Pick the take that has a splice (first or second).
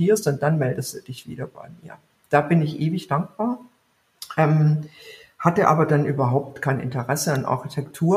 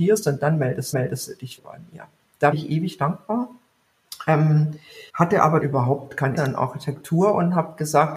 second